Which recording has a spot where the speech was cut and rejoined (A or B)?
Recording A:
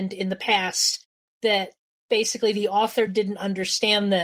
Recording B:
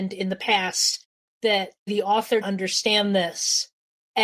B